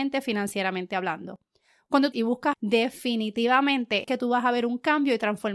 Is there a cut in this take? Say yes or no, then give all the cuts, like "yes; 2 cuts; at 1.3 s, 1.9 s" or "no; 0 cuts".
yes; 3 cuts; at 2.1 s, 2.5 s, 4.0 s